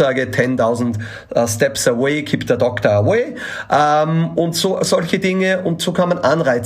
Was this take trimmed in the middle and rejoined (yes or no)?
no